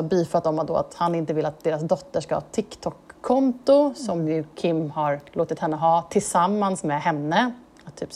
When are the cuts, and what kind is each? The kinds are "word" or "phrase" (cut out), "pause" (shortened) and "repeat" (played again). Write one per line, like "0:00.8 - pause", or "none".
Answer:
none